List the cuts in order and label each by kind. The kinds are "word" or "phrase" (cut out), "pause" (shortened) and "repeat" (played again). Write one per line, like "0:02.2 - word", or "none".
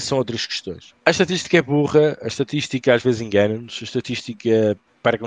0:01.0 - pause